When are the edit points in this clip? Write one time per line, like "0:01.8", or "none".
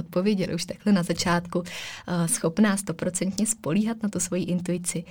0:02.3